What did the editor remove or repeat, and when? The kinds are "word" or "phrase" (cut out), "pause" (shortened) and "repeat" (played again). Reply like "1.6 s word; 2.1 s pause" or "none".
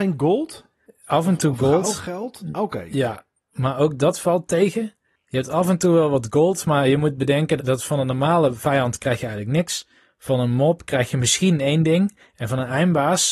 7.6 s word